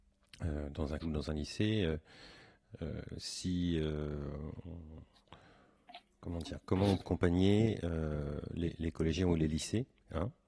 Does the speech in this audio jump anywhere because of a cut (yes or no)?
yes